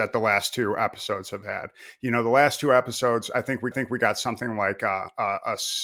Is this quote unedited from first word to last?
no; 1 cut; at 3.7 s

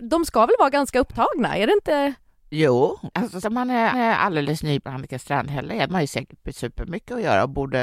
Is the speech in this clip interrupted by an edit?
yes; 6 cuts; at 2.3 s, 3.4 s, 3.9 s, 4.8 s, 5.9 s, 6.4 s

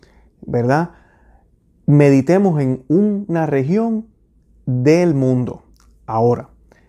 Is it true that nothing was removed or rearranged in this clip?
yes; 0 cuts

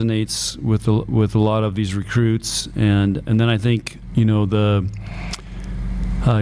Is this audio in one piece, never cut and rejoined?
no; 2 cuts; at 3.2 s, 4.1 s

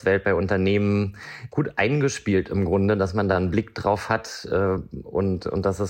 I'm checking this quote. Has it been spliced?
no; 0 cuts

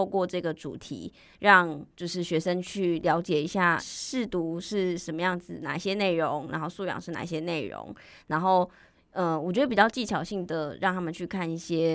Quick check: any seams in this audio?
yes; 2 cuts; at 1.9 s, 3.8 s

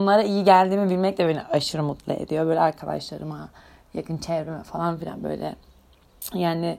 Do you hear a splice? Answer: no; 0 cuts

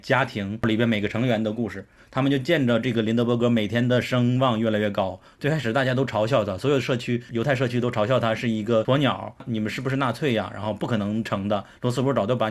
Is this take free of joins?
yes; 0 cuts

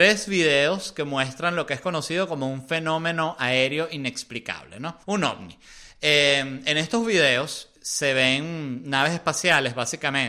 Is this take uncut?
no; 1 cut; at 5.0 s

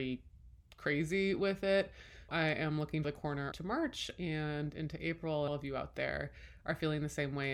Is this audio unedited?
no; 4 cuts; at 2.3 s, 3.0 s, 3.5 s, 5.5 s

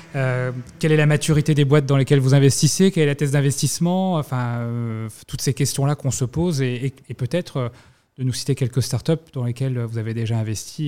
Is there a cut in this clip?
no; 0 cuts

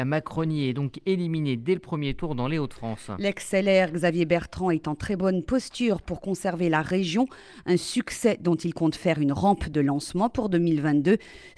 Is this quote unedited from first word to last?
yes; 0 cuts

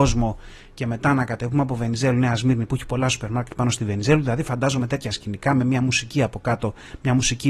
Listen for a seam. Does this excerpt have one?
no; 0 cuts

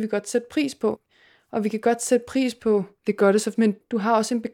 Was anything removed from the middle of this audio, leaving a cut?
yes; 1 cut; at 3.5 s

